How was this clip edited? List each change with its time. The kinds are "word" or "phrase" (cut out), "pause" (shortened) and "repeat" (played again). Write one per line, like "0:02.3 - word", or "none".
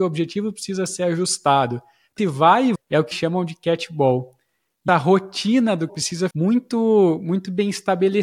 0:02.2 - word
0:02.7 - word
0:03.1 - word
0:04.9 - word
0:05.9 - word
0:06.3 - word